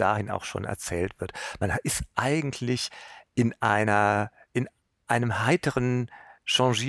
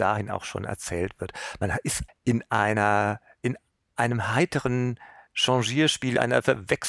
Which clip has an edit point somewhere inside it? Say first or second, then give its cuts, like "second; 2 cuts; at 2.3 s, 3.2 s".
second; 1 cut; at 2.1 s